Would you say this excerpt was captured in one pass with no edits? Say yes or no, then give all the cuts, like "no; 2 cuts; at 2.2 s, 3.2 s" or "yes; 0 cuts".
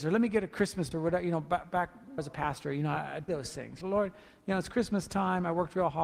no; 4 cuts; at 0.9 s, 2.2 s, 3.3 s, 3.8 s